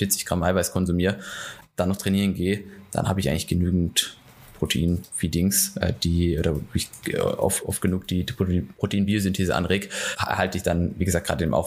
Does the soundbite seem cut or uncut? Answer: uncut